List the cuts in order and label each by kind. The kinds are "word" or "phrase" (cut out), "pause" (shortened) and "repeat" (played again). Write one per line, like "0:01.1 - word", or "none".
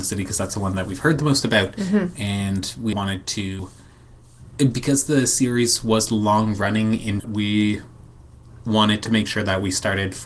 0:02.9 - word
0:07.2 - word